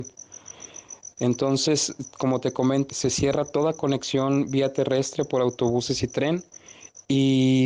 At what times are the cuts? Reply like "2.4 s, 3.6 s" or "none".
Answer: 2.9 s